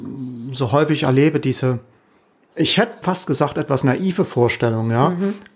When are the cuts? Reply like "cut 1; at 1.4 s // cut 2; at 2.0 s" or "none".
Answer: cut 1; at 3.0 s